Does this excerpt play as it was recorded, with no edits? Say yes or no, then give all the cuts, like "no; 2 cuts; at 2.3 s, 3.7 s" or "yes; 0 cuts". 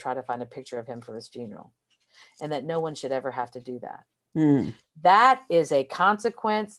yes; 0 cuts